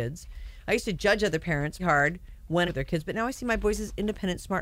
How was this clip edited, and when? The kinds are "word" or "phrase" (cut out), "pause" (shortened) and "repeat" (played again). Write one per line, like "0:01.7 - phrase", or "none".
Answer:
0:01.8 - word
0:02.7 - phrase